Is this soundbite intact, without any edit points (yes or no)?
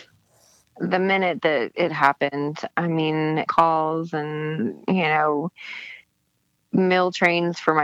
no